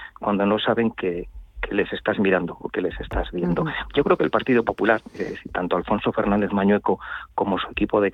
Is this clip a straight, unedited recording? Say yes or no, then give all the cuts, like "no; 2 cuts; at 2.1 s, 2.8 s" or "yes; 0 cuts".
yes; 0 cuts